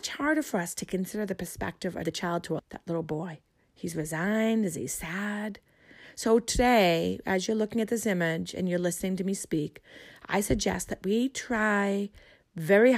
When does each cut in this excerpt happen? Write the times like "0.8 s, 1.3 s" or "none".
2.0 s, 2.6 s, 3.5 s